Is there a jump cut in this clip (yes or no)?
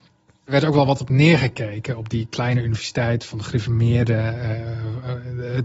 no